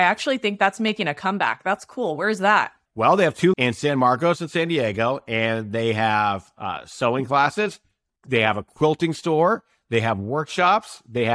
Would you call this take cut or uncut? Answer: cut